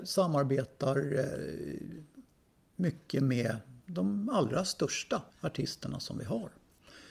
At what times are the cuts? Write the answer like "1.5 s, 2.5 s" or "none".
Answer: 5.3 s